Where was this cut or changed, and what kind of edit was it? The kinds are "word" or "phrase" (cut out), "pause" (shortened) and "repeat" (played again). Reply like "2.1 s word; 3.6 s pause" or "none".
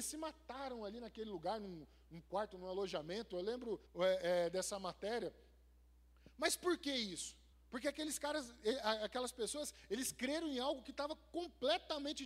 3.8 s pause; 7.5 s pause